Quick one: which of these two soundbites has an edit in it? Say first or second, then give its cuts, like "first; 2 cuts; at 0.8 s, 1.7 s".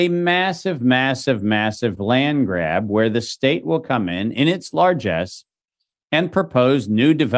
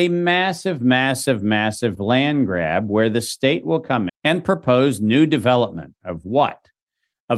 second; 1 cut; at 4.1 s